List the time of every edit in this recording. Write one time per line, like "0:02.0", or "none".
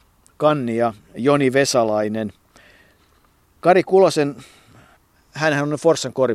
none